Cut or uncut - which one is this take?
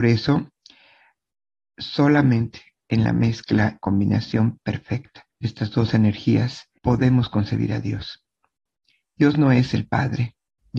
cut